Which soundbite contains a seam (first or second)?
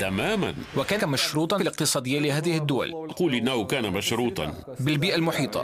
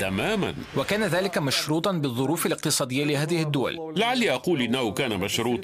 first